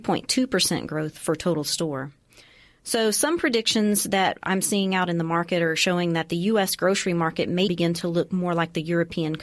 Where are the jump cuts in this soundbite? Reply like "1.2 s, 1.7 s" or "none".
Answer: 7.7 s